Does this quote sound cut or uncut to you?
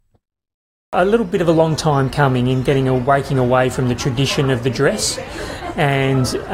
uncut